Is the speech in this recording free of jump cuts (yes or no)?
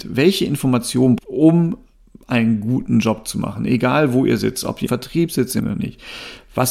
no